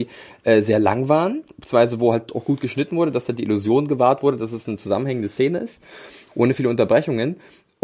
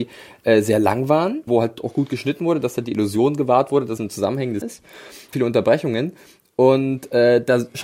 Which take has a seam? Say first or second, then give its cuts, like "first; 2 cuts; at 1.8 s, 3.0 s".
second; 4 cuts; at 1.5 s, 4.0 s, 4.6 s, 5.3 s